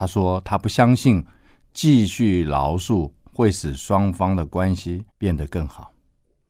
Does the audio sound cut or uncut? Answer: cut